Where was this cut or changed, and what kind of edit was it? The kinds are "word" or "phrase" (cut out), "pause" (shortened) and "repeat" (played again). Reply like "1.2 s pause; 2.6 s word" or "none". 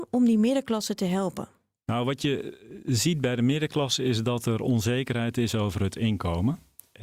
none